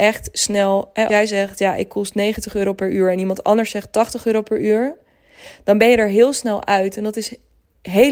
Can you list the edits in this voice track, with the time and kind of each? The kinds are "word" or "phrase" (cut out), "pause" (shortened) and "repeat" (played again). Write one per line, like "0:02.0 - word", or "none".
0:01.1 - word